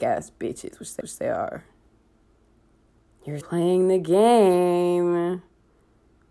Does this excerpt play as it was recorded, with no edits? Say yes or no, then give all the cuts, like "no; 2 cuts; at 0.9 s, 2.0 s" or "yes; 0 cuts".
no; 2 cuts; at 1.0 s, 3.4 s